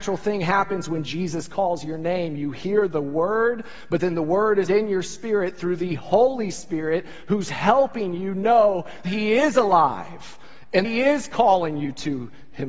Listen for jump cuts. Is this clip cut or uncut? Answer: cut